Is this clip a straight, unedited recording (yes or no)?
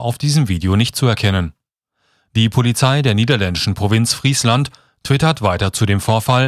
yes